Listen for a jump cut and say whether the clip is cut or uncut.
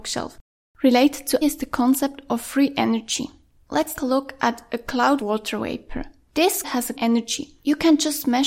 cut